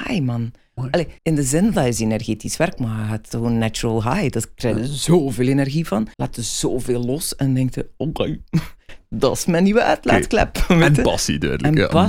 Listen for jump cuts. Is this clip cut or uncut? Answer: cut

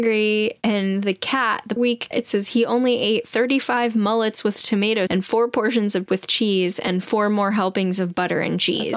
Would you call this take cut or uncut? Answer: cut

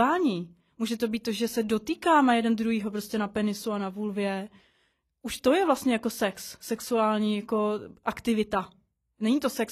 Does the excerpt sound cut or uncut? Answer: uncut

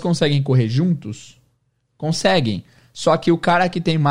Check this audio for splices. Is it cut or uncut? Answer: uncut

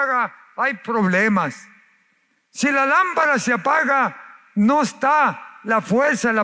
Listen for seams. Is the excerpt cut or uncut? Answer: uncut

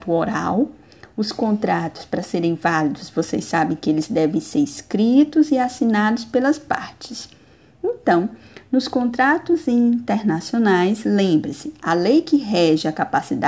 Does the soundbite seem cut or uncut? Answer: uncut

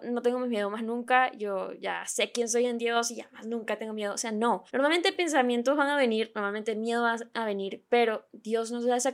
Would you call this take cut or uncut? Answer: cut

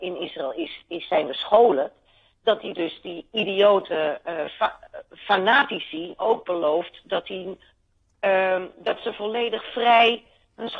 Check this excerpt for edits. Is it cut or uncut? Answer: uncut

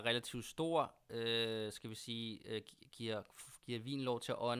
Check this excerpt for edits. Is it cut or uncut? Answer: uncut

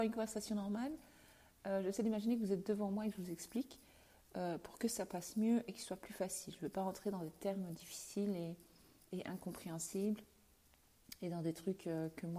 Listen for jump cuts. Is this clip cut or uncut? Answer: uncut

